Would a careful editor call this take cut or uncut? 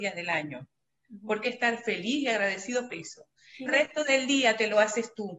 cut